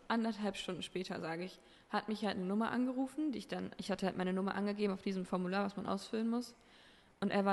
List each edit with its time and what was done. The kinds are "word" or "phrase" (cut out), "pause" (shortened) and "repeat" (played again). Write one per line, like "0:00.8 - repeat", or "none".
none